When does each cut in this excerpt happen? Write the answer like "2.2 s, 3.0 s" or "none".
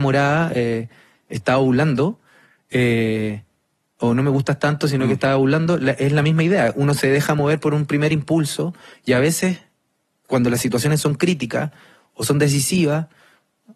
none